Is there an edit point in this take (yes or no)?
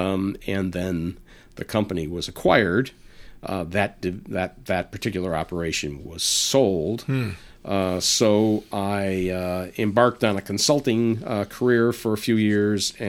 no